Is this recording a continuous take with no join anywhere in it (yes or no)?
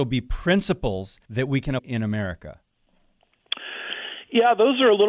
no